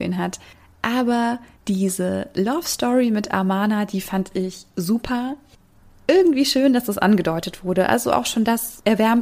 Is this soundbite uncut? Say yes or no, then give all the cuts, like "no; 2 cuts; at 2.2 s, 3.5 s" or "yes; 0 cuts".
yes; 0 cuts